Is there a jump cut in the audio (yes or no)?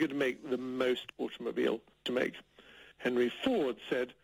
yes